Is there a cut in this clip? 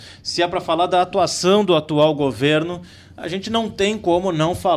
no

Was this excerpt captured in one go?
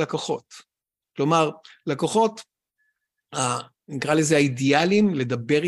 yes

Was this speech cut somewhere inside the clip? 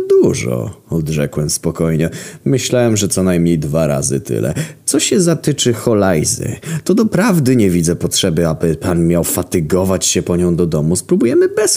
no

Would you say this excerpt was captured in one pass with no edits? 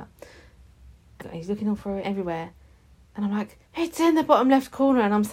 no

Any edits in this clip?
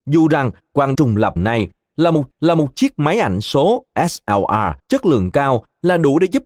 yes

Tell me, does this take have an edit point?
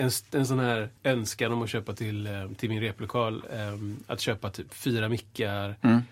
yes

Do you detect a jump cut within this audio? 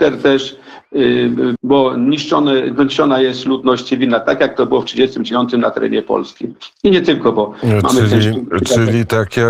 yes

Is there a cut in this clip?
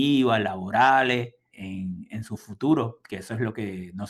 yes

